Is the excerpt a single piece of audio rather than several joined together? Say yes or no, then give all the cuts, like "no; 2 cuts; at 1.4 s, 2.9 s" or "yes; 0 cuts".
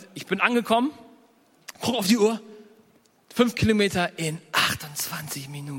yes; 0 cuts